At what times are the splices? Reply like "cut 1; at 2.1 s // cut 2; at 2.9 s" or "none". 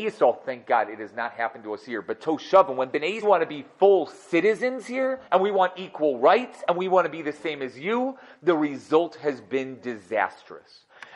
cut 1; at 3.2 s // cut 2; at 5.2 s